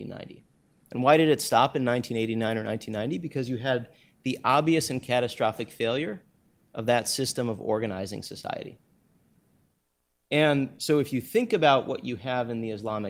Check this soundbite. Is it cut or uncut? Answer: uncut